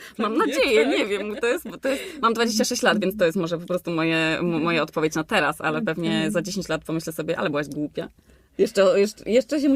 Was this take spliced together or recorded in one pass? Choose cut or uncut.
uncut